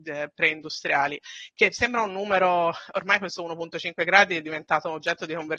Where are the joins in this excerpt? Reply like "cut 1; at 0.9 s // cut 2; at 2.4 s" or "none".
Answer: none

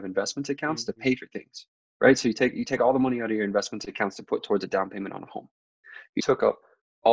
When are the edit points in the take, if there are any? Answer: cut 1; at 6.2 s

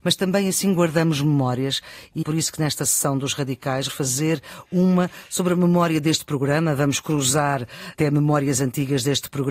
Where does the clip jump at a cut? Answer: cut 1; at 2.2 s // cut 2; at 3.9 s

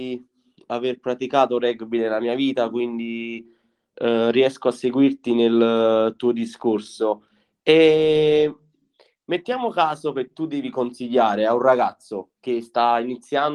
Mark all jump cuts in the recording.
none

